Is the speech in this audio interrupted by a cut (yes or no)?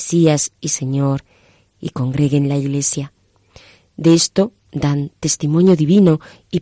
no